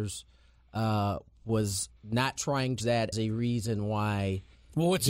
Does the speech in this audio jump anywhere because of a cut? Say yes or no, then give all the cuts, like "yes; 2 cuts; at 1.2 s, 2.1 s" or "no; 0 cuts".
yes; 3 cuts; at 2.0 s, 2.8 s, 3.1 s